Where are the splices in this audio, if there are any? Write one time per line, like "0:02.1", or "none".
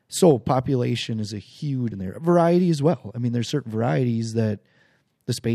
0:01.9